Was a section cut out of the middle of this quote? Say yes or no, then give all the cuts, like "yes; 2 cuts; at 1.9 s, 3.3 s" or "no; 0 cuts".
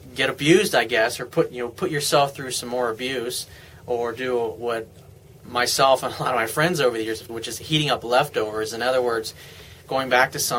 yes; 1 cut; at 7.3 s